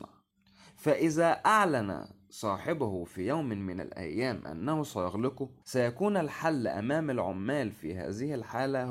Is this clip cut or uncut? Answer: cut